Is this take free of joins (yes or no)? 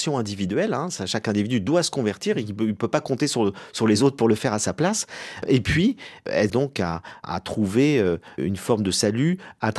no